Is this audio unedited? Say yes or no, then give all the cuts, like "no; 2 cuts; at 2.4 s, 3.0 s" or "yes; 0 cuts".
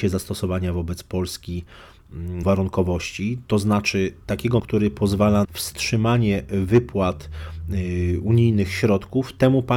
no; 3 cuts; at 2.4 s, 4.6 s, 5.4 s